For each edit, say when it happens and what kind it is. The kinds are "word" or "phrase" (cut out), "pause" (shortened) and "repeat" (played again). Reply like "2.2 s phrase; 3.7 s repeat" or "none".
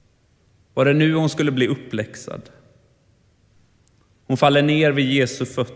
none